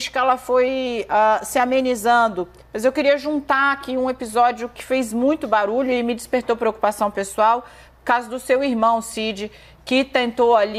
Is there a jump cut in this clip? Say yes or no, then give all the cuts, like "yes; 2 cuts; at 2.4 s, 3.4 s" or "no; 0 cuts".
no; 0 cuts